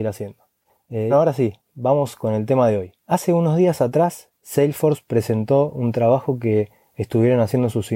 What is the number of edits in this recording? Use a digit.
2